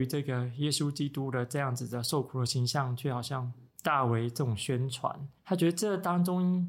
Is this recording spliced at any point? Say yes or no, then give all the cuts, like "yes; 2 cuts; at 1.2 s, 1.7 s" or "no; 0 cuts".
yes; 1 cut; at 5.4 s